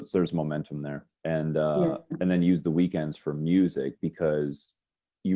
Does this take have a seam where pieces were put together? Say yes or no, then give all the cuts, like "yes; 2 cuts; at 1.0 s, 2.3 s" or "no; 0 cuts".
yes; 1 cut; at 1.1 s